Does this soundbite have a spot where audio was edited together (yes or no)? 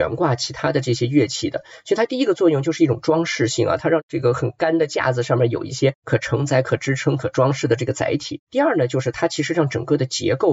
no